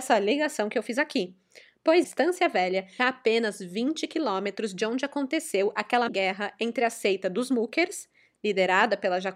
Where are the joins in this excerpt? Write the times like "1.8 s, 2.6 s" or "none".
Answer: 2.0 s, 3.0 s, 6.1 s